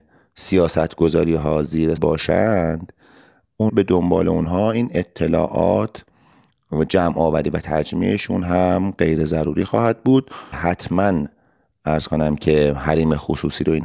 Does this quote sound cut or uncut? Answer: cut